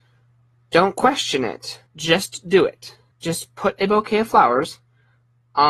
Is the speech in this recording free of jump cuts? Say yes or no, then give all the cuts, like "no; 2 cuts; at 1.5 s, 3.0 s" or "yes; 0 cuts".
no; 2 cuts; at 1.9 s, 3.1 s